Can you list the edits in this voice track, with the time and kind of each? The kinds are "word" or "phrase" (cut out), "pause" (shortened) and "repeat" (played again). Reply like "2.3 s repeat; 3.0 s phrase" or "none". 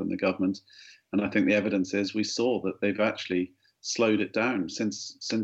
none